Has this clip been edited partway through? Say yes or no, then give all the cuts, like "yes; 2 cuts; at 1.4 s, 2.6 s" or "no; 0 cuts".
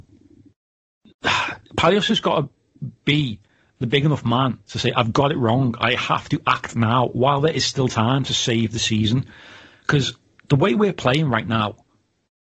no; 0 cuts